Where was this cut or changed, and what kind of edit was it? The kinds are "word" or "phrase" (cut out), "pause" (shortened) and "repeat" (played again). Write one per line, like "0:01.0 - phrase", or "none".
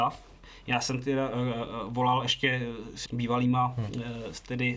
0:03.0 - phrase